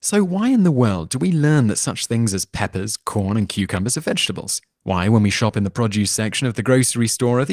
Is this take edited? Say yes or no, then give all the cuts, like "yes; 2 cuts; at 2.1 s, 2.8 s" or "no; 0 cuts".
no; 0 cuts